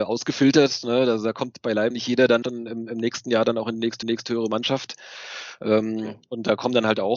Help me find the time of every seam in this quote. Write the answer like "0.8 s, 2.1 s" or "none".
1.9 s, 2.4 s, 4.0 s

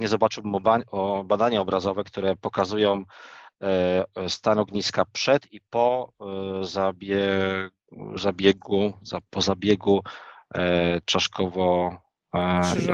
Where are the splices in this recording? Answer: 9.3 s

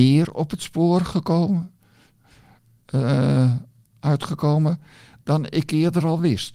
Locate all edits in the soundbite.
none

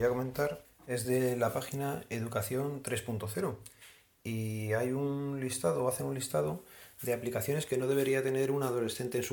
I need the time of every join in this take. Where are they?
none

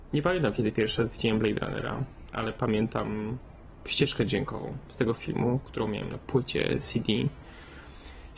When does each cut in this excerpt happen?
none

